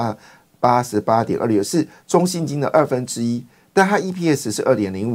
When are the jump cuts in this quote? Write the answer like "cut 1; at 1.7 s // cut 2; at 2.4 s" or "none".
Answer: none